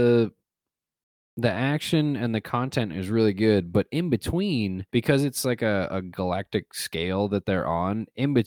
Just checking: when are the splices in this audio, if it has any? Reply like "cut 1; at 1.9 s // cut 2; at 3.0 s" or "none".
cut 1; at 4.9 s